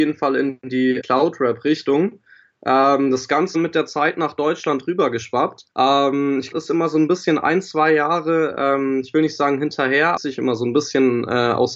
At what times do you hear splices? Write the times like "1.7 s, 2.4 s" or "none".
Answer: 1.0 s, 3.5 s, 5.7 s, 6.5 s, 10.2 s